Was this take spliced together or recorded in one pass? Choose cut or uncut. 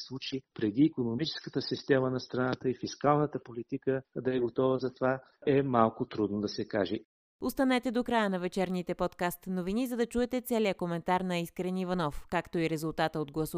uncut